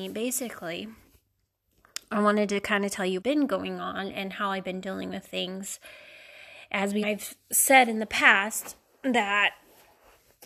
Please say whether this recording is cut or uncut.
cut